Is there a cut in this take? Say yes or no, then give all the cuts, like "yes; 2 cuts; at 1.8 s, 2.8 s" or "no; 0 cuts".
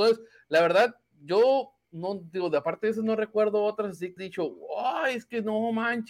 yes; 2 cuts; at 1.8 s, 4.2 s